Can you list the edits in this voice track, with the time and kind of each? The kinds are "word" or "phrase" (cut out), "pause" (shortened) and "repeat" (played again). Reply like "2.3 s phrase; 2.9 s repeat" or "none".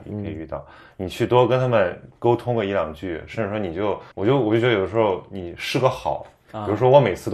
4.1 s pause